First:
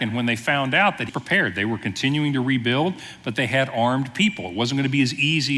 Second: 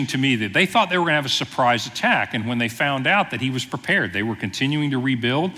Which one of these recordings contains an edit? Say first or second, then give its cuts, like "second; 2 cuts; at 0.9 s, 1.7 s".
first; 1 cut; at 1.1 s